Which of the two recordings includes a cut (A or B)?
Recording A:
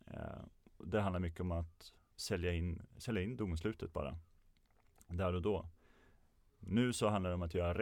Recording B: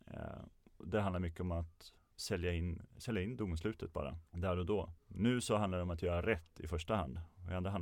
B